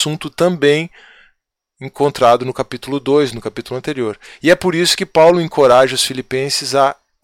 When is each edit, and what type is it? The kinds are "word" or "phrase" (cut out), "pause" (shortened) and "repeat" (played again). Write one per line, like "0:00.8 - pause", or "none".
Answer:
none